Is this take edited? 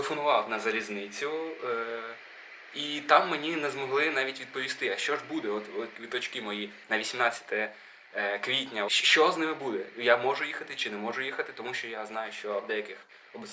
yes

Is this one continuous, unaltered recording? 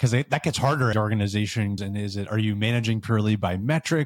no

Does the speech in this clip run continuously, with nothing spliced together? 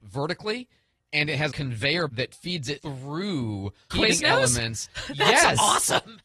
no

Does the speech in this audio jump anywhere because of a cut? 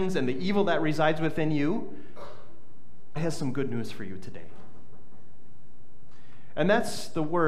yes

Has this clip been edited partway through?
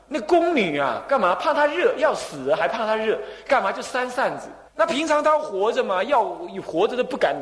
yes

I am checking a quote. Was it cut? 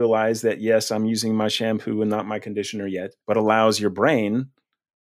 yes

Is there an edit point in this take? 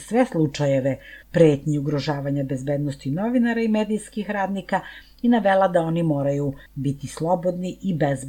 yes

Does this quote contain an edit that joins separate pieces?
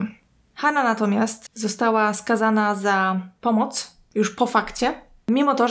no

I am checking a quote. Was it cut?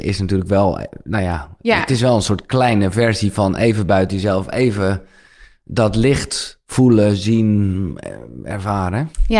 no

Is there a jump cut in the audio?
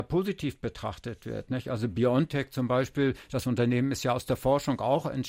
no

